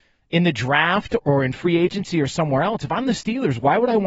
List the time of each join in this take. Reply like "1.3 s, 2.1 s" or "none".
1.2 s